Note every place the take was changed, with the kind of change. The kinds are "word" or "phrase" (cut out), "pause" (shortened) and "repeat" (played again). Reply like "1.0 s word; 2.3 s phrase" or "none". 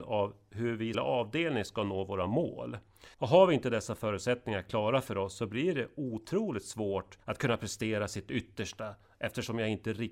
0.9 s phrase; 3.1 s pause; 7.2 s pause